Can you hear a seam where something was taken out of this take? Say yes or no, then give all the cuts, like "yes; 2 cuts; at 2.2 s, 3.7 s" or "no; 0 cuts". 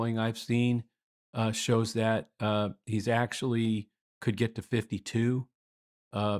no; 0 cuts